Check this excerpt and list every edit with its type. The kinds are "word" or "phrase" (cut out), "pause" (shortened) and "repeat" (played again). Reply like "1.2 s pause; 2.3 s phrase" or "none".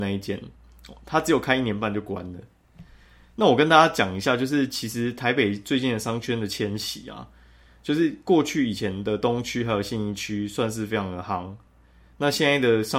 none

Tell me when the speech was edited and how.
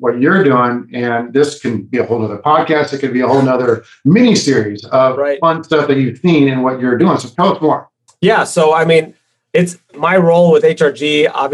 9.9 s word

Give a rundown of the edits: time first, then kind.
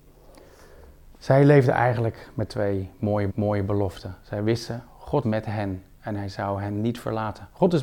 2.5 s word; 3.3 s repeat; 5.2 s word

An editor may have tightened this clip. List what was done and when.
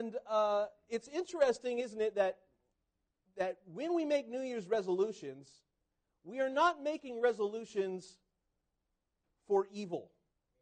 none

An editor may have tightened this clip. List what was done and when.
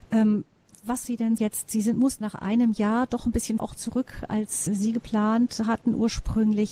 1.0 s word; 1.4 s word; 2.2 s word; 3.6 s word; 4.7 s word

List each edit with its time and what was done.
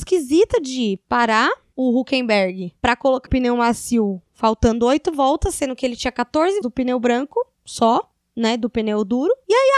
3.3 s word; 4.2 s pause; 6.6 s word

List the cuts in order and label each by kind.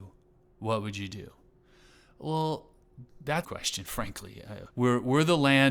3.1 s word; 3.4 s phrase; 4.7 s pause

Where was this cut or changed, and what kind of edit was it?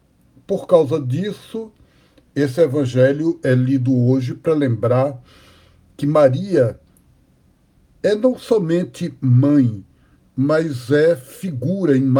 none

